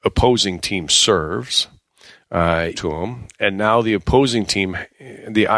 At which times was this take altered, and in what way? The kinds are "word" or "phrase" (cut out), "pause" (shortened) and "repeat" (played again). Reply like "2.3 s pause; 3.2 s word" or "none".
2.7 s phrase